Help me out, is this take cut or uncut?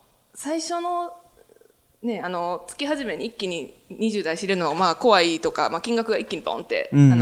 uncut